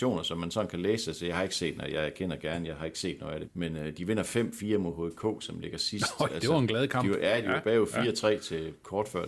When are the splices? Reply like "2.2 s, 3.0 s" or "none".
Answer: 3.4 s